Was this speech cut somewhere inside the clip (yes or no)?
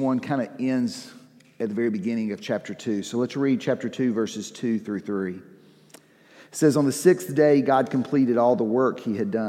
no